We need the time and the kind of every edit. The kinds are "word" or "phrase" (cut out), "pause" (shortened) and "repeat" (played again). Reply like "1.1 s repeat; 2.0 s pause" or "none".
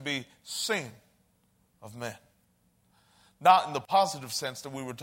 none